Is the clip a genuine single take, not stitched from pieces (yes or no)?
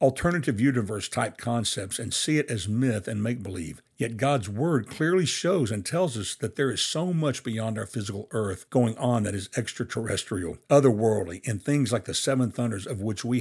no